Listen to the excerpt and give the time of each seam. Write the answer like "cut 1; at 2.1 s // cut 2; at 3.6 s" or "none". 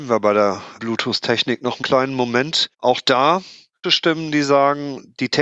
cut 1; at 1.8 s // cut 2; at 2.7 s // cut 3; at 3.8 s